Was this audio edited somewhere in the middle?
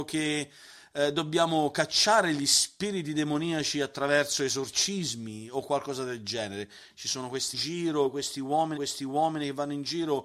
yes; 2 cuts; at 7.5 s, 8.8 s

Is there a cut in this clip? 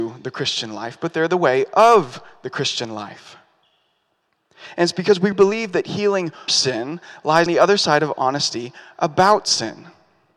yes; 3 cuts; at 5.3 s, 6.5 s, 7.5 s

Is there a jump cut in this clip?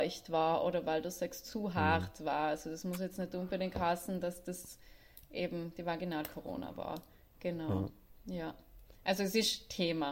no; 0 cuts

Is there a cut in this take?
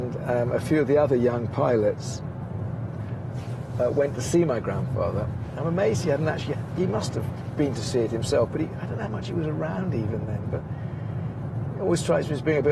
no; 0 cuts

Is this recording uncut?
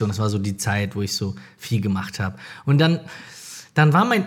yes; 0 cuts

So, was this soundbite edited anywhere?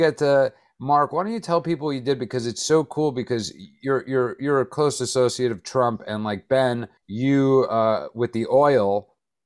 yes; 1 cut; at 7.0 s

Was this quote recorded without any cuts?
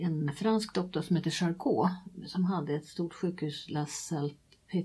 yes; 0 cuts

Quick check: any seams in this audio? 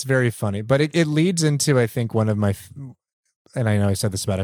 no; 0 cuts

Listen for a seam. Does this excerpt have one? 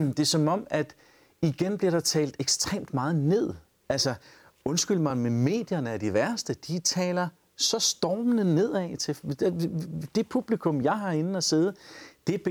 no; 0 cuts

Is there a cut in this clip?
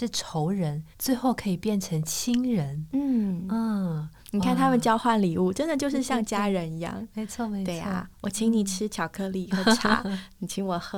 yes; 2 cuts; at 0.9 s, 4.2 s

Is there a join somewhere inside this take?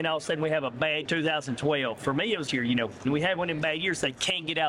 yes; 3 cuts; at 1.0 s, 2.5 s, 3.0 s

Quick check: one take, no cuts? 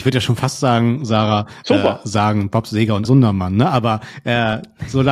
no; 1 cut; at 3.0 s

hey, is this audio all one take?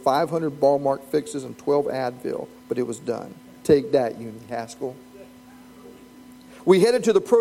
no; 1 cut; at 3.4 s

